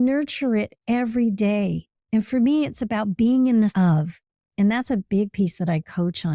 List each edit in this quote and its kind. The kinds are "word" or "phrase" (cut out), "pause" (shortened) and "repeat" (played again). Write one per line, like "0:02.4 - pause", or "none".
0:02.0 - pause
0:03.7 - word

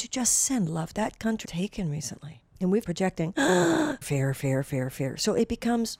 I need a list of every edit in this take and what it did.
0:00.9 - phrase
0:01.4 - word
0:02.5 - pause
0:02.9 - phrase
0:04.0 - word

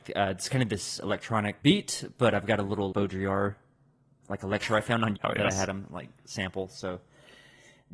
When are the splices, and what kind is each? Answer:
0:01.6 - word
0:02.9 - word
0:04.2 - word
0:05.2 - word

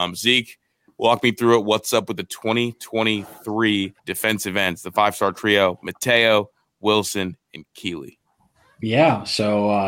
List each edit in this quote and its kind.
0:04.0 - pause

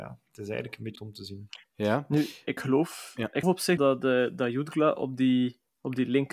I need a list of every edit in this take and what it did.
0:01.0 - word
0:01.7 - pause
0:02.6 - word
0:03.4 - word
0:03.8 - word

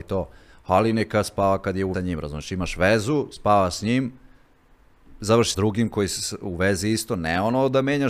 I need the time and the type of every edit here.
0:01.9 - phrase
0:05.5 - phrase

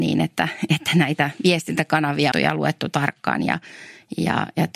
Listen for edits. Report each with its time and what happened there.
0:02.3 - phrase

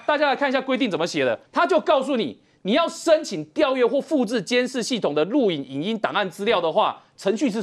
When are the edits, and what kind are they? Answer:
0:01.5 - pause

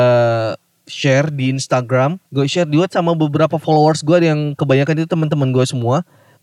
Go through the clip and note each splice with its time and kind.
0:02.2 - pause
0:02.9 - word

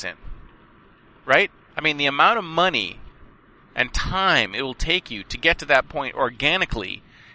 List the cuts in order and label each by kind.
none

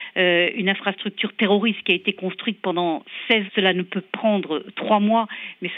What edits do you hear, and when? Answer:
0:03.5 - word
0:04.0 - word

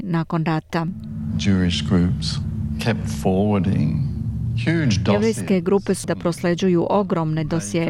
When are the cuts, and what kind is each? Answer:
0:06.0 - word

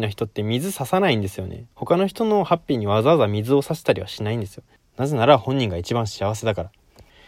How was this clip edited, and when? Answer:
0:01.7 - pause

